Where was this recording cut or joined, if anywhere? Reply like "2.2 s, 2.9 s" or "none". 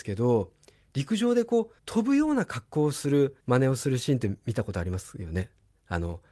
1.8 s, 3.4 s